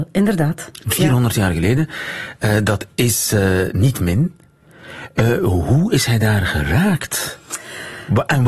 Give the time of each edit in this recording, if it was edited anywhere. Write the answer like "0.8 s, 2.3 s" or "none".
none